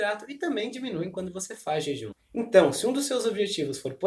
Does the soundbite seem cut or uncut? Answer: uncut